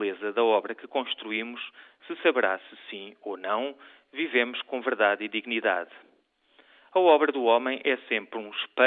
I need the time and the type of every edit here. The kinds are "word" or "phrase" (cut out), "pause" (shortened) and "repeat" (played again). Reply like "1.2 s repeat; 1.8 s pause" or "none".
none